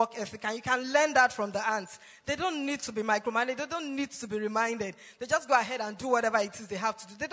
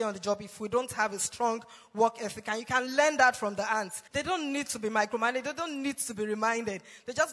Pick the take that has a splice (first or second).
second